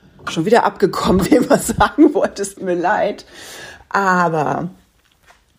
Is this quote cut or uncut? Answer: cut